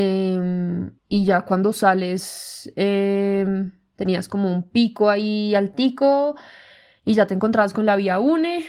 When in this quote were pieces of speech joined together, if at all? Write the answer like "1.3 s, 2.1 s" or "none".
1.0 s